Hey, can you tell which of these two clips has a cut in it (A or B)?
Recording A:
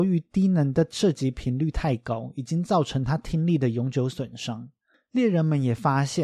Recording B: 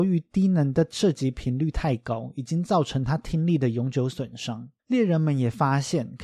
B